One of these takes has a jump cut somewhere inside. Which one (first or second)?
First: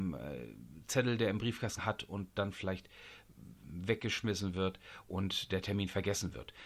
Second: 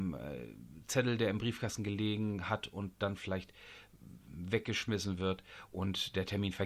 first